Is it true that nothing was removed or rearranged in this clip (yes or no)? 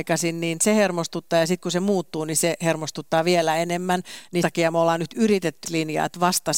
no